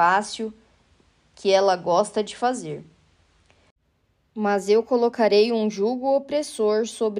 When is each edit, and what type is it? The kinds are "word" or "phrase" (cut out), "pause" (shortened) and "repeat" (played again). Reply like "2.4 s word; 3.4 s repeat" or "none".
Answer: none